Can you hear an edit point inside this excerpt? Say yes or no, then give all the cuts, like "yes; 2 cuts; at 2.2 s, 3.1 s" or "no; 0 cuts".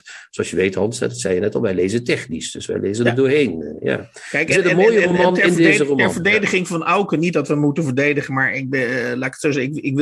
no; 0 cuts